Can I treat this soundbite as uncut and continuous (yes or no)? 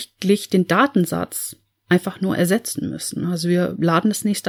yes